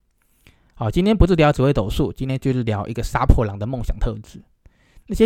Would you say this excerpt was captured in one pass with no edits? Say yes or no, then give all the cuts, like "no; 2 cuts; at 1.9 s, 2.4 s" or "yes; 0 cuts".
yes; 0 cuts